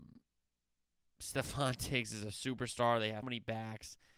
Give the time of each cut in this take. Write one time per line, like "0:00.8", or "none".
0:03.2

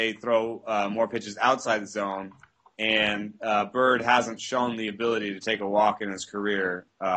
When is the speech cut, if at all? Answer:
none

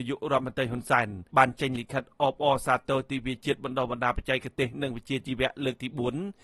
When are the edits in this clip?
0:01.3

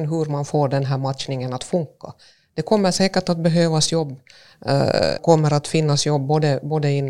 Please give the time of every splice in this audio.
0:05.2

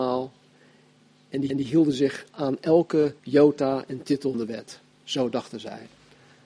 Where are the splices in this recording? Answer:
0:01.5
0:03.2
0:04.3

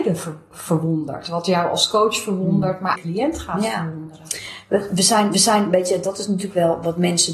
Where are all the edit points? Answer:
0:02.9
0:05.3

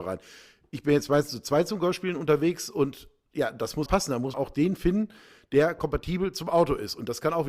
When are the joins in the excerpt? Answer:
0:03.9
0:04.3

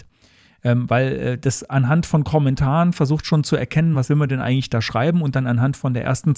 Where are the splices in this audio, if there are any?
none

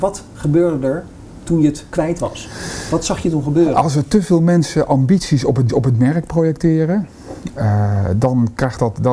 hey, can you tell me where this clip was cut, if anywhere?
0:05.7
0:07.6

